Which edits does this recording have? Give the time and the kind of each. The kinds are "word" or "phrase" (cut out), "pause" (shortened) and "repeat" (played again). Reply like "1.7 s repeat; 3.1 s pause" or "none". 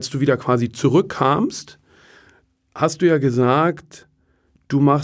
none